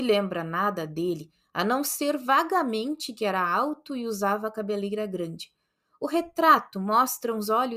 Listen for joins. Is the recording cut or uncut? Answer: uncut